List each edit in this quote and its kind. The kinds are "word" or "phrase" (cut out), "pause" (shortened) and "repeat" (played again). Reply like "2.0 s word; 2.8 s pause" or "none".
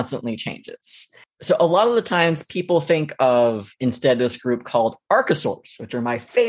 none